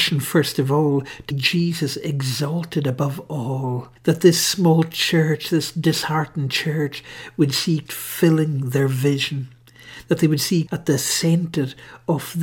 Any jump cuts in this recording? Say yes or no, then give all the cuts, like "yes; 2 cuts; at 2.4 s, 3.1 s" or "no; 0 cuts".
yes; 4 cuts; at 1.3 s, 4.0 s, 7.9 s, 10.7 s